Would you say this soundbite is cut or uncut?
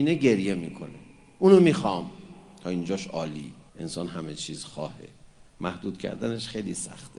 cut